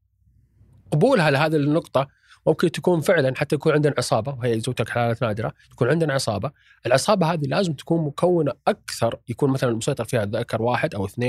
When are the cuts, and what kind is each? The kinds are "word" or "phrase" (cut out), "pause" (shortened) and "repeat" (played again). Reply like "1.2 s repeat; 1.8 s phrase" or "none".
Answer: 5.6 s pause